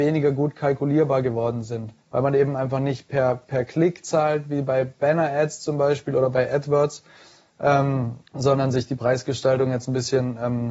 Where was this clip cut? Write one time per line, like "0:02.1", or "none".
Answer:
0:02.0
0:08.3